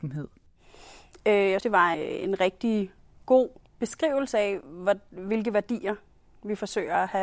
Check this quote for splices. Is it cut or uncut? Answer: cut